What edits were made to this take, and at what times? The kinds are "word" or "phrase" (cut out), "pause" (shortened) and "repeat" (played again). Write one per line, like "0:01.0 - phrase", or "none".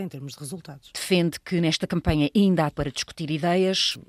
0:02.7 - word